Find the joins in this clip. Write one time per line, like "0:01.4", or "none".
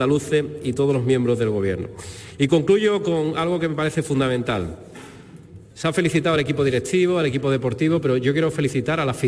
none